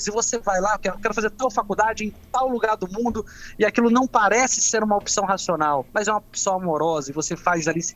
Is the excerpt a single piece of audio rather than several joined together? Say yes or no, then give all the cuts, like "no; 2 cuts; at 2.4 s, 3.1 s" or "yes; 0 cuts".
no; 1 cut; at 5.9 s